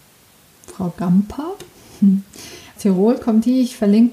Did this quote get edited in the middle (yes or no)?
yes